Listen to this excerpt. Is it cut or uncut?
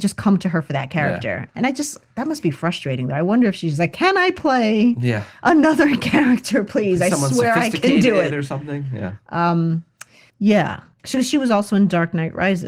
uncut